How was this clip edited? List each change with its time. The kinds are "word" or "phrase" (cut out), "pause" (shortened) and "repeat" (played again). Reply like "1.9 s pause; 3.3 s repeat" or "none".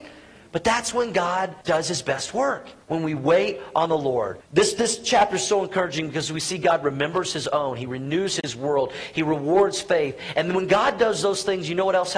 1.6 s pause; 2.8 s pause; 4.4 s pause